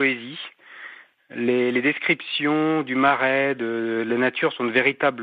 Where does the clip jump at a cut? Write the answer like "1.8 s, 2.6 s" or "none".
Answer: none